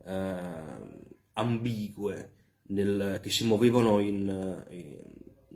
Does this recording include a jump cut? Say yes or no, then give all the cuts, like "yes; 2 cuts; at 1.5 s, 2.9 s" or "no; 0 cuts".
no; 0 cuts